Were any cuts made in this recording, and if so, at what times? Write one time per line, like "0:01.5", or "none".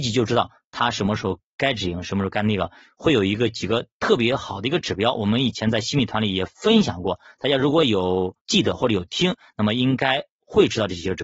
0:08.4